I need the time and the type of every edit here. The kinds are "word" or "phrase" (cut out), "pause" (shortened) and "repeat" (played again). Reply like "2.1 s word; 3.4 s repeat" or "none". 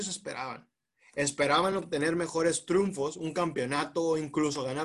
none